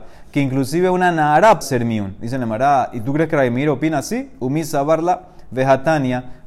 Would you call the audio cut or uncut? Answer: cut